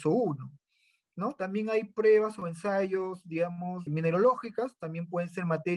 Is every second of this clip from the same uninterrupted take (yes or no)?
no